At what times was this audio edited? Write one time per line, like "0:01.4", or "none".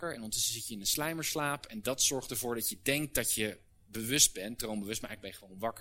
none

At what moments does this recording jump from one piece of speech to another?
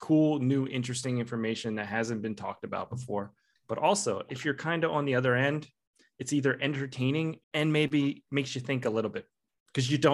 0:07.4

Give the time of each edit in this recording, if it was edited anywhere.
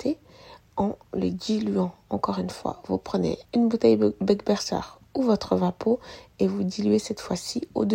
0:03.4

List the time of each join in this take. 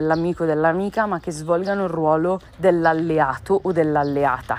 0:02.5

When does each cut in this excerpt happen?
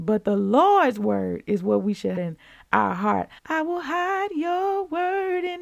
0:02.2
0:03.4

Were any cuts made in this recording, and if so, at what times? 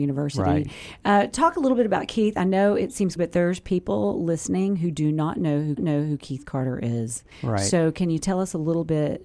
0:03.2
0:05.8
0:07.3

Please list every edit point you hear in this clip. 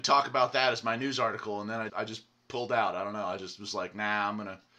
0:01.9

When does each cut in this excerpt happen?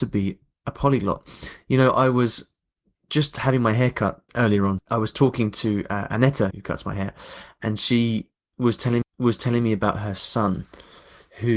0:04.3
0:04.8
0:06.5
0:09.0

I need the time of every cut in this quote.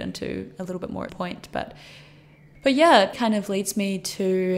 0:01.1
0:03.1

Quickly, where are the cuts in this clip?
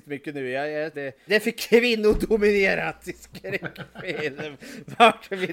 0:00.9
0:01.3

